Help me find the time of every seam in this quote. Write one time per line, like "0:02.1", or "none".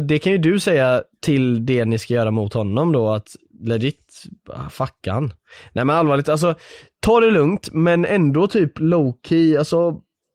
none